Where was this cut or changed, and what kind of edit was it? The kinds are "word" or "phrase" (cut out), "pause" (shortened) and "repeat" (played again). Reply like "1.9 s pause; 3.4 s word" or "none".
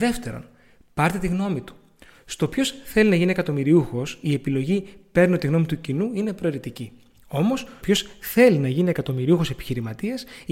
7.8 s word